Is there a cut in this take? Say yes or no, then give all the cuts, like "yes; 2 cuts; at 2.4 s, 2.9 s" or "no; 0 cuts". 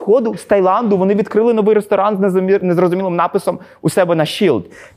no; 0 cuts